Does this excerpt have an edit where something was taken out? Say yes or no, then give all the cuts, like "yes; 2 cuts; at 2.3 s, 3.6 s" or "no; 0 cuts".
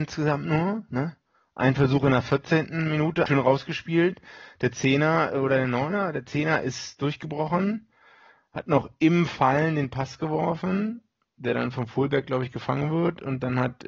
yes; 1 cut; at 3.3 s